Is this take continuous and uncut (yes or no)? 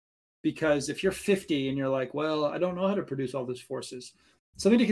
yes